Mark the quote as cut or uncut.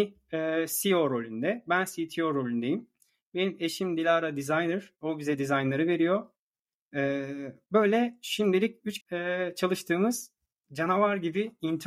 cut